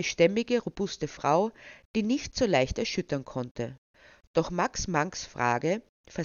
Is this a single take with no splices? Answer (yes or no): yes